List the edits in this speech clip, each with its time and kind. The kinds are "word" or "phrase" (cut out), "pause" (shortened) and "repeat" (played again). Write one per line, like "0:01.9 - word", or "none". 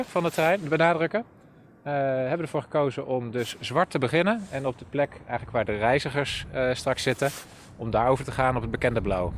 none